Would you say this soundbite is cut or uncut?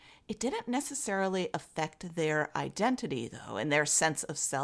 uncut